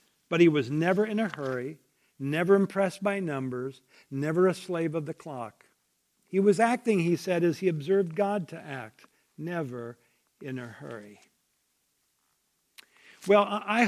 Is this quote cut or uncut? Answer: uncut